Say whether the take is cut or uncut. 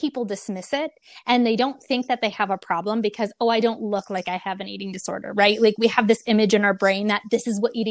uncut